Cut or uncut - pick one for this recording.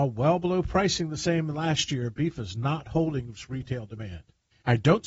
uncut